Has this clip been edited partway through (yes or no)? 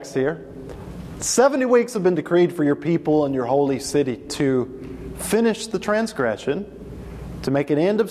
no